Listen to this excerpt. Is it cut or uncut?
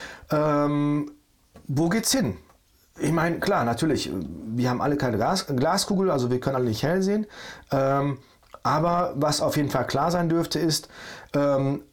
uncut